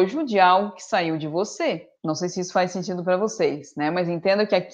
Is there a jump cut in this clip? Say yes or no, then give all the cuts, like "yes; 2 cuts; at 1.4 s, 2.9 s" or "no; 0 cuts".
yes; 1 cut; at 2.0 s